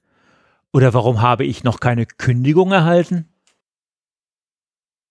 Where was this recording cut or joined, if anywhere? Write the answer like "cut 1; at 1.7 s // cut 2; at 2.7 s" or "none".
none